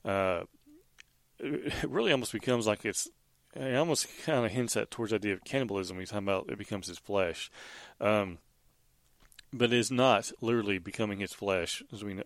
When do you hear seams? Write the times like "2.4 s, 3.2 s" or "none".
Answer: none